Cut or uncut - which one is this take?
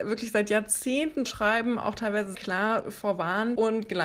cut